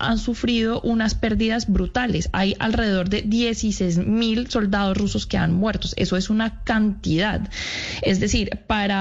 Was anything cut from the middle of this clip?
no; 0 cuts

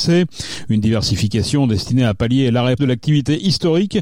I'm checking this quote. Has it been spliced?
yes; 1 cut; at 2.8 s

